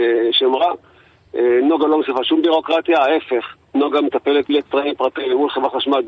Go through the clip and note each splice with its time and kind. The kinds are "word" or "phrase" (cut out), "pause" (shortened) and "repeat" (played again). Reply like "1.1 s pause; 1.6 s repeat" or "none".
4.5 s word